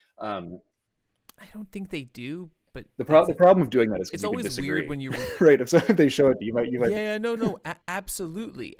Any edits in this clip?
yes; 4 cuts; at 6.4 s, 7.0 s, 7.4 s, 7.8 s

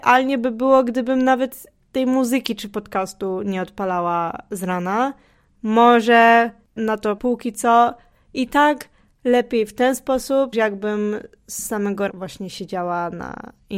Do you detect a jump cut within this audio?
yes; 4 cuts; at 6.8 s, 7.2 s, 10.5 s, 12.1 s

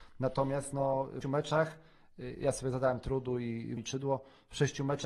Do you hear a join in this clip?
yes; 2 cuts; at 1.2 s, 3.8 s

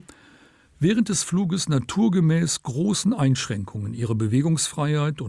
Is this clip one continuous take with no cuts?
yes; 0 cuts

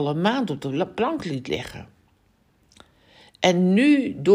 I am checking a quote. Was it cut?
no; 0 cuts

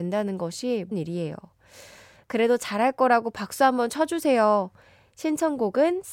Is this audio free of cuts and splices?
no; 1 cut; at 0.9 s

